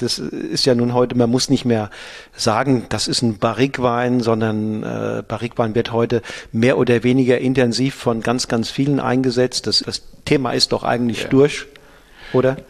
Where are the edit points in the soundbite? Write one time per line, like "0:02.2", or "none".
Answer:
0:09.8